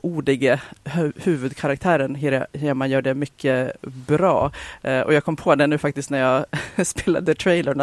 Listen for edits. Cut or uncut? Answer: uncut